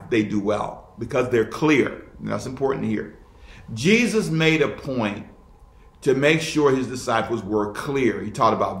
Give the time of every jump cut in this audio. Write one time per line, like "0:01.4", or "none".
none